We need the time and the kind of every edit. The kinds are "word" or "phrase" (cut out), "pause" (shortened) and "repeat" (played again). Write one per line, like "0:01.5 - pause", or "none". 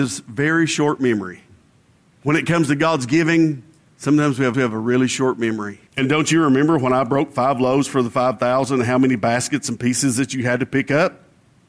0:01.6 - pause
0:03.8 - pause
0:04.5 - repeat
0:05.9 - pause